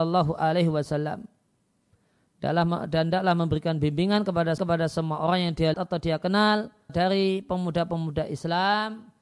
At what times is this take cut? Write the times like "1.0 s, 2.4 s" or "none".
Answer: 4.6 s, 5.7 s, 6.9 s